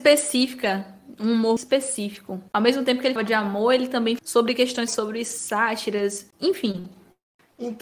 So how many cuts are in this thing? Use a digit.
6